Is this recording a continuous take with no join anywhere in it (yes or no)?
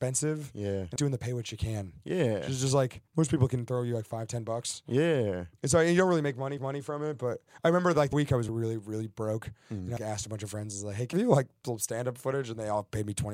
no